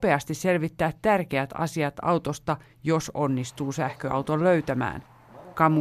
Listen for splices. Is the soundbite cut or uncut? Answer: uncut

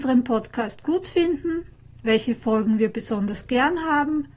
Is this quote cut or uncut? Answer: uncut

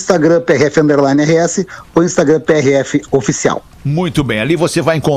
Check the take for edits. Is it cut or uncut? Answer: uncut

